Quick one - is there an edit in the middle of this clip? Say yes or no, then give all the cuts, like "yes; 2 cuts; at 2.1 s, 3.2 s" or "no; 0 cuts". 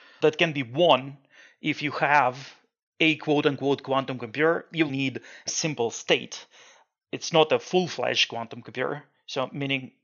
yes; 2 cuts; at 4.9 s, 5.5 s